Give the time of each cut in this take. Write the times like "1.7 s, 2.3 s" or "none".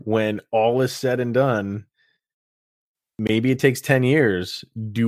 none

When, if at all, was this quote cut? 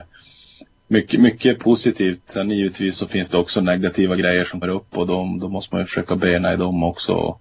2.9 s, 4.6 s

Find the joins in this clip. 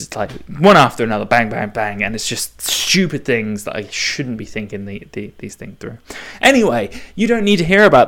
none

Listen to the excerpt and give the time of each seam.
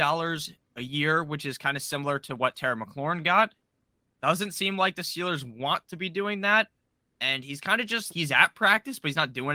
8.1 s

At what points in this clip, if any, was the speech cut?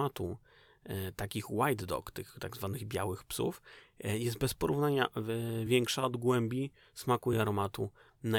none

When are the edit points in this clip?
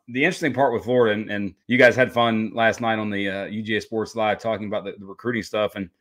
1.6 s

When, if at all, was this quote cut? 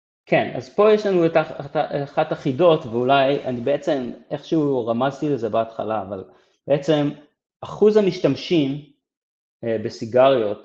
none

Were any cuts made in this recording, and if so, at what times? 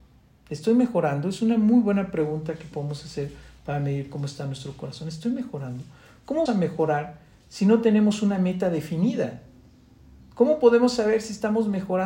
6.5 s

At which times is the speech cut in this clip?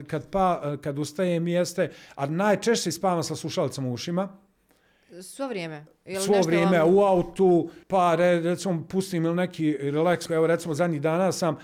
7.8 s, 10.3 s

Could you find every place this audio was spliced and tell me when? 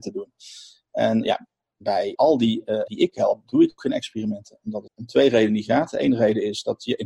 1.2 s, 2.1 s, 2.9 s, 3.8 s, 4.9 s

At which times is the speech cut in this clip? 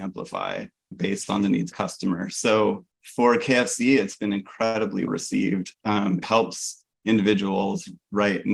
0.9 s, 1.7 s, 2.9 s, 5.1 s, 6.2 s

